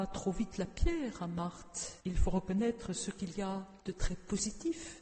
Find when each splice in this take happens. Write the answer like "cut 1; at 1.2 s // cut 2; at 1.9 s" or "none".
cut 1; at 2.0 s // cut 2; at 3.8 s